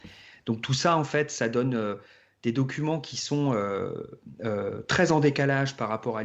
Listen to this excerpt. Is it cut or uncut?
uncut